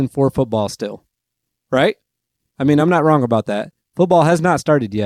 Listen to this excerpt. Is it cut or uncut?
uncut